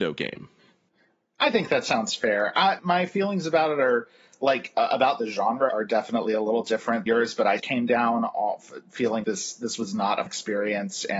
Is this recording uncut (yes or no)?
no